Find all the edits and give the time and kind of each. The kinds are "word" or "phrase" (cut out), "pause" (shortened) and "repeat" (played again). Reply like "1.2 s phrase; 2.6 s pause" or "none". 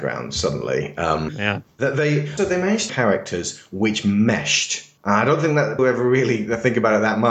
1.3 s word; 2.4 s word; 2.9 s phrase; 5.0 s pause; 5.8 s word

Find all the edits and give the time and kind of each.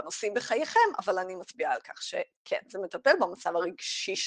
none

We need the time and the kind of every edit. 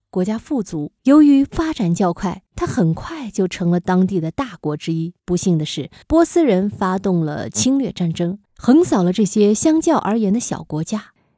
1.0 s pause; 2.5 s pause; 5.2 s pause; 6.0 s pause; 8.4 s pause

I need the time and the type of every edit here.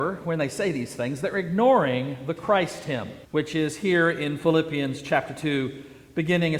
3.2 s pause

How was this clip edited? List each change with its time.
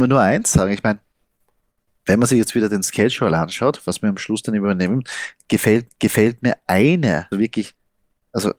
5.9 s repeat; 7.3 s word

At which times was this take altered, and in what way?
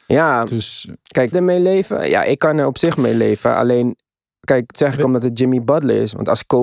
1.3 s phrase; 4.7 s phrase

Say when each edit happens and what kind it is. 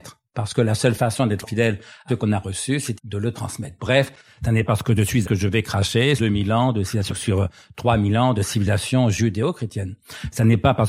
1.4 s word; 2.1 s word; 3.0 s word; 4.7 s word; 5.2 s word; 6.2 s word; 7.1 s word

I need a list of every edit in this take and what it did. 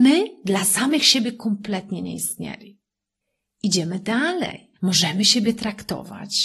3.2 s pause; 4.8 s pause

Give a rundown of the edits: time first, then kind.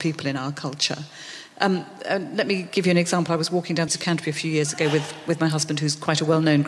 3.9 s phrase

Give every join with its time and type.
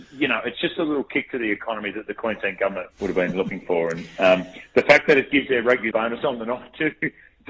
2.9 s pause; 5.9 s phrase

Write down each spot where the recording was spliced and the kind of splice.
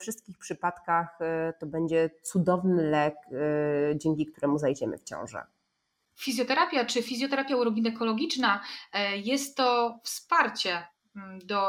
none

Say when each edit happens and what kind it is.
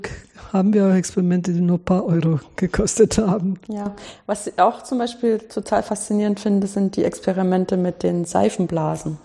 3.6 s pause

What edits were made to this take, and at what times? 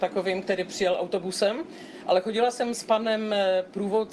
none

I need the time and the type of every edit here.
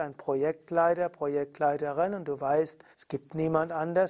2.9 s pause

